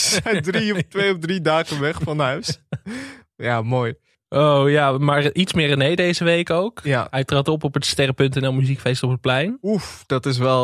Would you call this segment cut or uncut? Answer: uncut